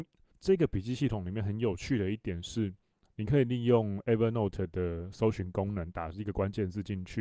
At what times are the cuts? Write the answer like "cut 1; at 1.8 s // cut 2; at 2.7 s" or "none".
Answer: none